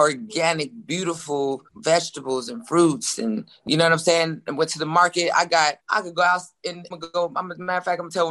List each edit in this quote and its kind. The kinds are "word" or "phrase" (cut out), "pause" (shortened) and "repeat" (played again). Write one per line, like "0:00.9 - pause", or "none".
0:01.7 - pause
0:05.8 - pause
0:06.9 - word